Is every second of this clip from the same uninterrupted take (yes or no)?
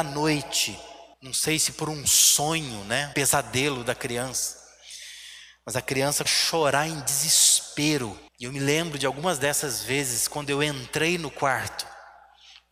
no